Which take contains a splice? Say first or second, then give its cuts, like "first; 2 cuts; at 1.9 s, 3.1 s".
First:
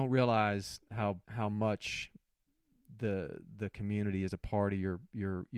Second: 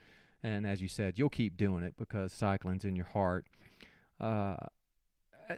first; 1 cut; at 1.2 s